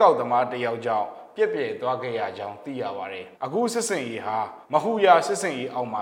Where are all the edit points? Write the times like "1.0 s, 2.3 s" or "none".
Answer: 3.3 s, 4.6 s

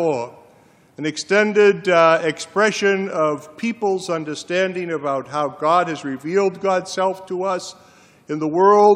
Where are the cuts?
none

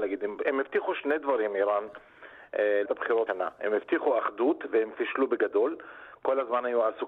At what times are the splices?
2.8 s, 3.3 s

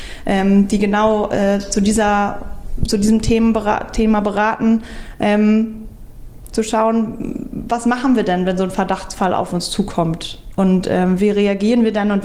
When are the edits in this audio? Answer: none

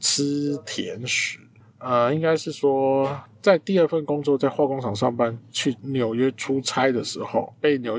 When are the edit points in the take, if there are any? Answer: none

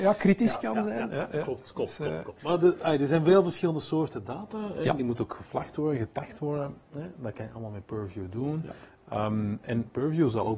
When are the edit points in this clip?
none

